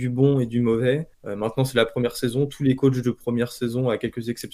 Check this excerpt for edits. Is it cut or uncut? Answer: uncut